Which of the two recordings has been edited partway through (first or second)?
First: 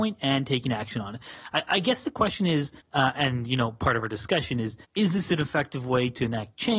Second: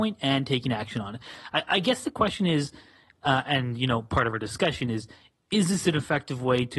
first